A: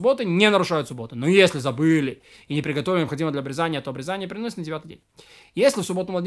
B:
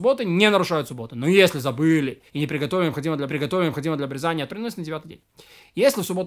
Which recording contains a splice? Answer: B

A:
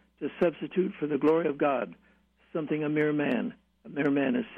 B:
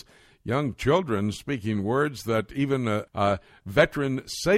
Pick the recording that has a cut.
B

